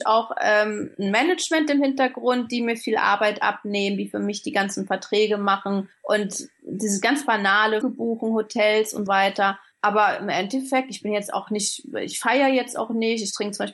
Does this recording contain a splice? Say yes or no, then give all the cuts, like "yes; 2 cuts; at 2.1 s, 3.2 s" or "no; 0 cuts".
yes; 2 cuts; at 7.8 s, 9.1 s